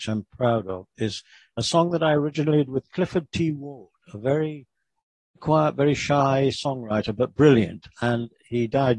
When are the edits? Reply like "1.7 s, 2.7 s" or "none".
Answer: 2.7 s, 5.4 s